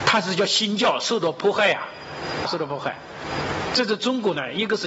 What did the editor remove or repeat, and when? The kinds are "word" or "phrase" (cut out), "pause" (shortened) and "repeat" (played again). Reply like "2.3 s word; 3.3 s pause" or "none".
2.4 s word